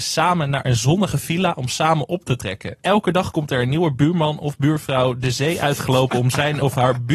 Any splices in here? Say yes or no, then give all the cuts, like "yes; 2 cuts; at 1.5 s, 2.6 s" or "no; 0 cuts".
yes; 1 cut; at 2.8 s